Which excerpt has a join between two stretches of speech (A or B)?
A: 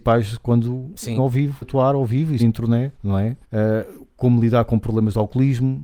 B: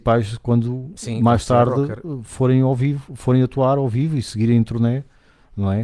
A